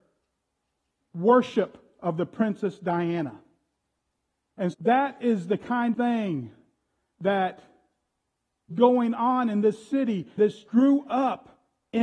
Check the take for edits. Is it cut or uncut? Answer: cut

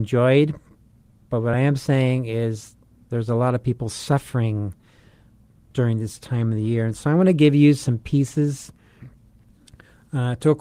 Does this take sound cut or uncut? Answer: uncut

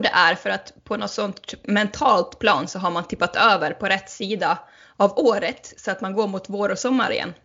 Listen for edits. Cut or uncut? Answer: uncut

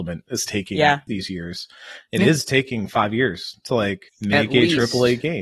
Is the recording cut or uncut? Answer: cut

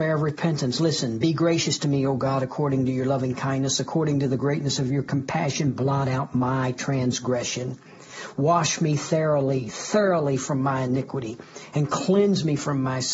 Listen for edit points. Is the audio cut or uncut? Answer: uncut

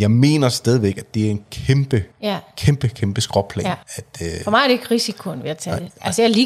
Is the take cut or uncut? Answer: cut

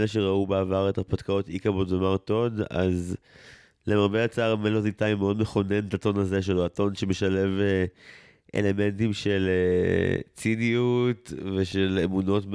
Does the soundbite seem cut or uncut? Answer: uncut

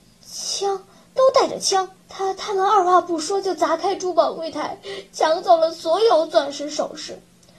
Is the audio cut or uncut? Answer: cut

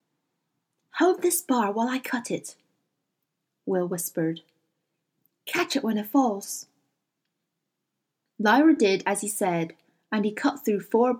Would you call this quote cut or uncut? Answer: uncut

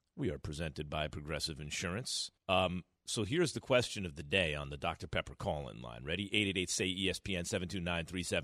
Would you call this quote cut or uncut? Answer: cut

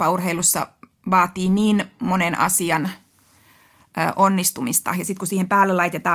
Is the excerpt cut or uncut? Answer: uncut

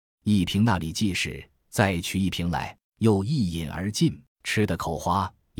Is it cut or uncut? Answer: cut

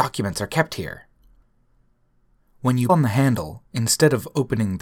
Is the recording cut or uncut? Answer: cut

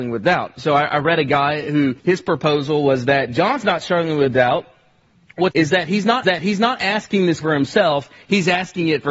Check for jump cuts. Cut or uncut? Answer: cut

